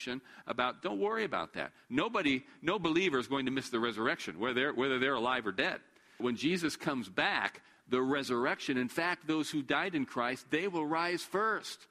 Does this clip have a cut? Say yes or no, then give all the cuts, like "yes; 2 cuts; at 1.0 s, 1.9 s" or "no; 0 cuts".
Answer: yes; 1 cut; at 6.2 s